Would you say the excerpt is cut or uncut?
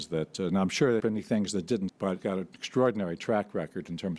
cut